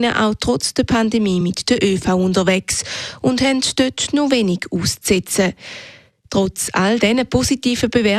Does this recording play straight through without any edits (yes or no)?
yes